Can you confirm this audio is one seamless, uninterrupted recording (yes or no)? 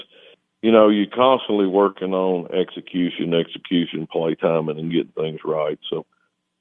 yes